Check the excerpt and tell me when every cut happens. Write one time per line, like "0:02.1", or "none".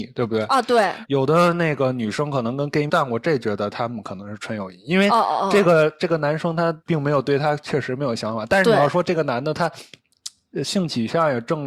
0:01.0
0:02.9
0:06.8